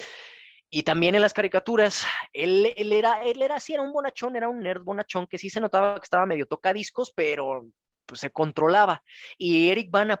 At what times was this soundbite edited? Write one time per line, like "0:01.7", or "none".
none

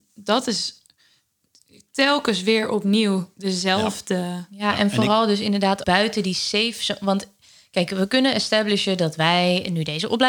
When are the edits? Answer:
0:05.8

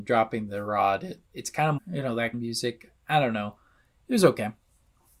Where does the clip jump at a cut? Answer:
0:01.3
0:01.8
0:02.3

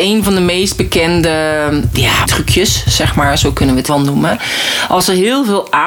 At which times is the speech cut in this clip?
0:02.3
0:03.9

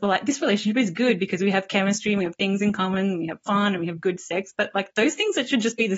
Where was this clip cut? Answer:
none

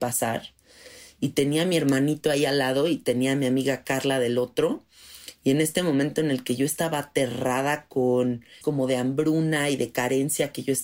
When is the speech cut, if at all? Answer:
0:08.6

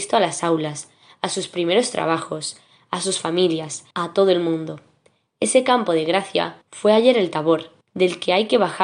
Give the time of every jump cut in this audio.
0:03.9
0:06.6
0:07.8

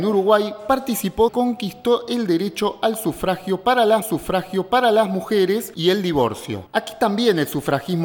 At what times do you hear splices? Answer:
0:01.3
0:04.0

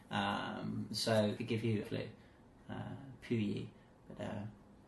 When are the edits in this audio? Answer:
0:01.4
0:01.8

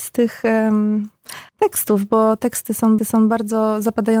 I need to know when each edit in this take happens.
0:01.5
0:03.0

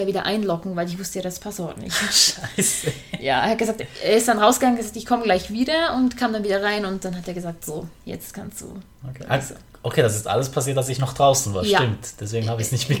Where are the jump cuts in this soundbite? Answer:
0:08.0

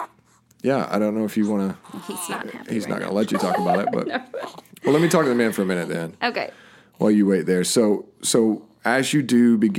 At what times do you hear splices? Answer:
none

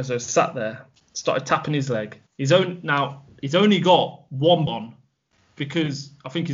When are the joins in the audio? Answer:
0:02.3
0:04.7

